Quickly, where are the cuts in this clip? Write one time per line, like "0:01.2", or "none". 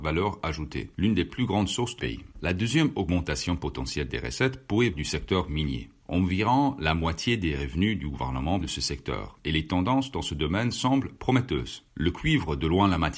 0:02.0
0:02.3
0:04.9
0:08.6